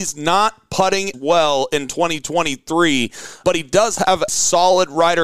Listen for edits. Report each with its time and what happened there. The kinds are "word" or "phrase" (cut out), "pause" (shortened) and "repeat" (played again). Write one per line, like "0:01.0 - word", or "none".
0:01.1 - word
0:04.3 - word